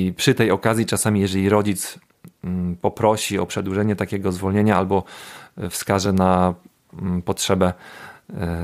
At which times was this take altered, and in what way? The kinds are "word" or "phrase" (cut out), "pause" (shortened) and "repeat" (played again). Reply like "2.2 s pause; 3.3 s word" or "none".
none